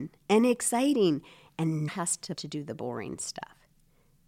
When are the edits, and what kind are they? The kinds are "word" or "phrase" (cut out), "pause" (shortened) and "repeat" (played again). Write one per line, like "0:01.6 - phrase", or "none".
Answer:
0:01.9 - word
0:02.4 - word